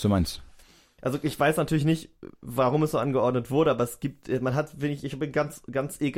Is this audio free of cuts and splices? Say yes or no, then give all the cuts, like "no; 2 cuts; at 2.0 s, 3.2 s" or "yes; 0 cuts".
yes; 0 cuts